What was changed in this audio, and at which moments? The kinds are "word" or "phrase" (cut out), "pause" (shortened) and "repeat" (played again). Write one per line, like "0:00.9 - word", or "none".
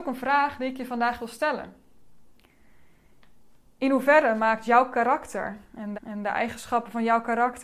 0:05.9 - repeat